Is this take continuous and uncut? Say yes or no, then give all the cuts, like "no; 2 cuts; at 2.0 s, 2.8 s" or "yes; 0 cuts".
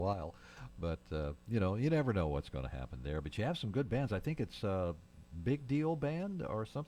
yes; 0 cuts